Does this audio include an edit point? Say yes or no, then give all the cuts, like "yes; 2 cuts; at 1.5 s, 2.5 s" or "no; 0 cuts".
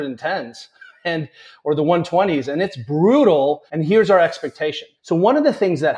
yes; 2 cuts; at 3.7 s, 5.0 s